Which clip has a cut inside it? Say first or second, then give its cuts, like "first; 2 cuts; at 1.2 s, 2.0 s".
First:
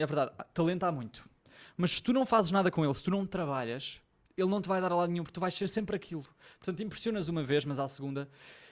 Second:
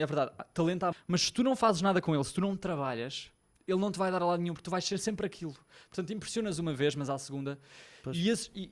second; 1 cut; at 0.9 s